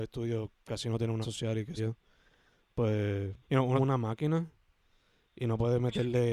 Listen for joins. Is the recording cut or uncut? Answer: cut